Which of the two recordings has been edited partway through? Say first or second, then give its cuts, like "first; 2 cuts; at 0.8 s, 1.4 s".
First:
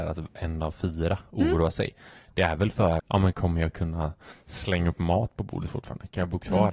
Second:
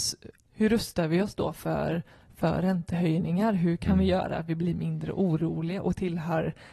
first; 1 cut; at 3.0 s